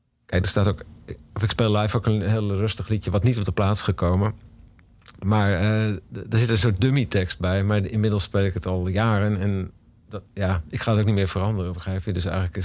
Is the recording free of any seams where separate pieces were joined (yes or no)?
yes